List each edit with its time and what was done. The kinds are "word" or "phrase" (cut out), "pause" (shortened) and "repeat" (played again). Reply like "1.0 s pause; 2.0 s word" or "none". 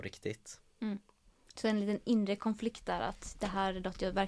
none